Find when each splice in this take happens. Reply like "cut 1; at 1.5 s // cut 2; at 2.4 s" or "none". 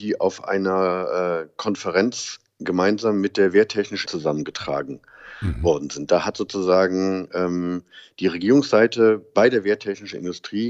cut 1; at 4.0 s